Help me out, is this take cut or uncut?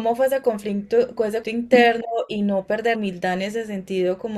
cut